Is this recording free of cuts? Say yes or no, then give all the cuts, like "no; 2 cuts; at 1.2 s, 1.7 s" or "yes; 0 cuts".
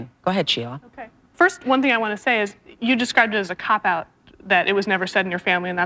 yes; 0 cuts